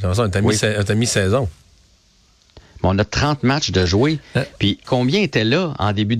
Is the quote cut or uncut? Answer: cut